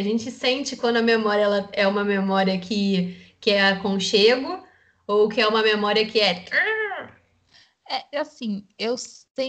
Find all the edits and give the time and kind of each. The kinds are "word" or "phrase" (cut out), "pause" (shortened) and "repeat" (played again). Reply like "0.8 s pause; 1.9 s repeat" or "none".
none